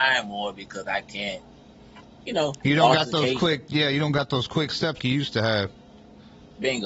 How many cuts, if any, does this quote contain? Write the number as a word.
one